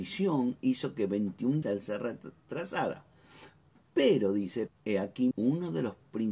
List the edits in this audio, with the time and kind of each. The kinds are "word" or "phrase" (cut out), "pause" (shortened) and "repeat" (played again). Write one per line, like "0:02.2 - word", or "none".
0:01.6 - word
0:04.7 - word
0:05.3 - word